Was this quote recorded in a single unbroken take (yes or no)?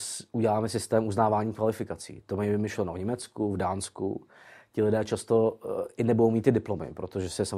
yes